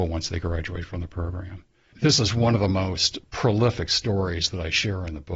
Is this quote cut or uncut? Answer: uncut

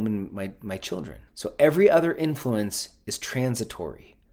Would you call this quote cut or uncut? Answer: cut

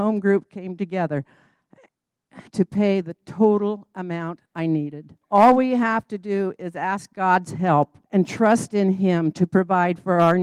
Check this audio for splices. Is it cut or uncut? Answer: cut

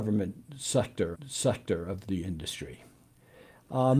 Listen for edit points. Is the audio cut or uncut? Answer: cut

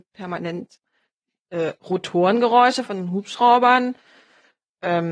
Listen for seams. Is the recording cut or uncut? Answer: uncut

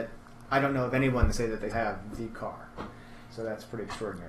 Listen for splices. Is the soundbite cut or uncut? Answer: cut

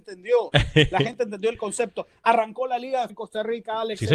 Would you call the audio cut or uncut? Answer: cut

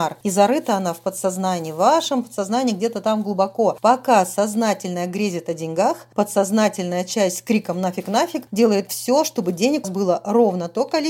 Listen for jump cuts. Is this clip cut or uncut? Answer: cut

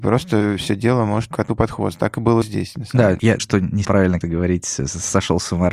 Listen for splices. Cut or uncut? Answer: cut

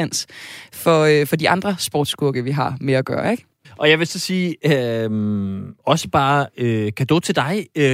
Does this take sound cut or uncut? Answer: cut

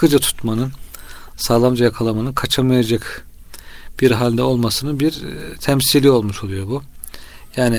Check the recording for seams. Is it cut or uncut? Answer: uncut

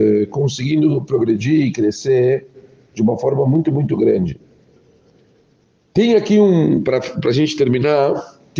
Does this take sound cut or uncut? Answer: uncut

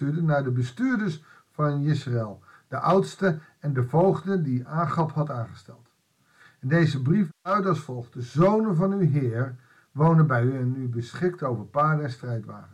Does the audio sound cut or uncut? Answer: uncut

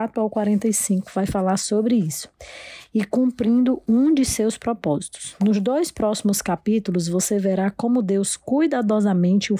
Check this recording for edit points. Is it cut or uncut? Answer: uncut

